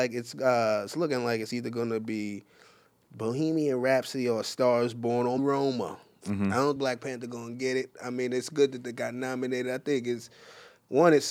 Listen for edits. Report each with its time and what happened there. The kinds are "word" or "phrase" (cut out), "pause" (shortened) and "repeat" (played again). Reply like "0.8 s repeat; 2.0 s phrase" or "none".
5.4 s word; 6.8 s word